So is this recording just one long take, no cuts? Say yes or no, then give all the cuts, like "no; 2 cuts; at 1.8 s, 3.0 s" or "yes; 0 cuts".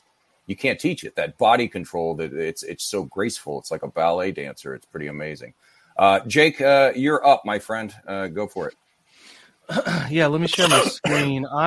yes; 0 cuts